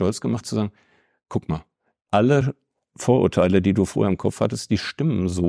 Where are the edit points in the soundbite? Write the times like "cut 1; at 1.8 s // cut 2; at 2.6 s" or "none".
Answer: none